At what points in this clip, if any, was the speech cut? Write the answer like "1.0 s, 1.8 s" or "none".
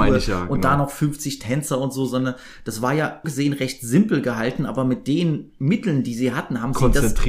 3.2 s